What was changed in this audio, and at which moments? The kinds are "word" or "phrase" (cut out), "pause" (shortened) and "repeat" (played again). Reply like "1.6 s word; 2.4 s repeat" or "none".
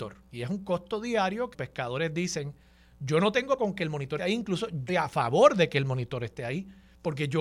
1.5 s word; 3.6 s word; 4.2 s word; 4.9 s word